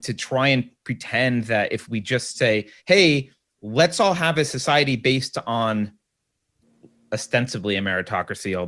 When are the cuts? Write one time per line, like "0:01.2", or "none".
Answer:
0:02.8

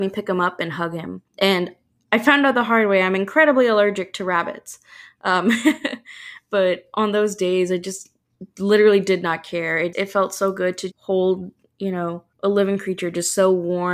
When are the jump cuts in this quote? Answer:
0:01.3
0:09.9
0:10.9
0:12.3

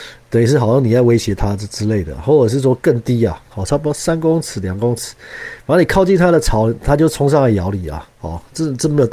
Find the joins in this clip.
0:08.1

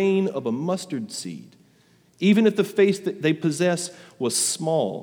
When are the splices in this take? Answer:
none

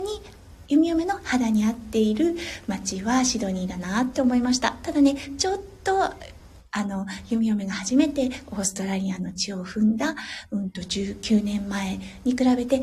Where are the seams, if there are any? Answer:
none

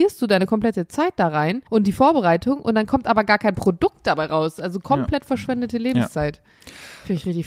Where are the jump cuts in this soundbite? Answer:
0:01.7

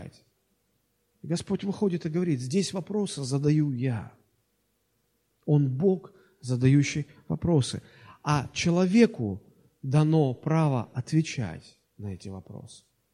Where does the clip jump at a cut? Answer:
none

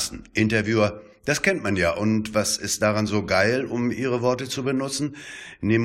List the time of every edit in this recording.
none

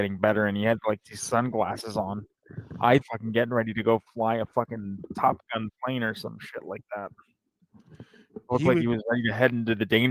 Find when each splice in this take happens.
0:03.0

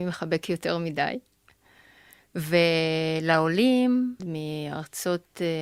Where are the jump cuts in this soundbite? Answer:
0:04.2

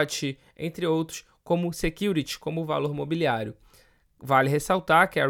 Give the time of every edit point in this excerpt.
none

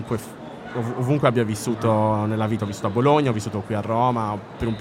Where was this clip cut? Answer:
none

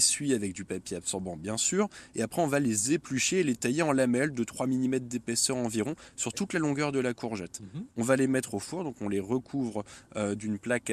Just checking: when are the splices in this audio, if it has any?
0:07.9

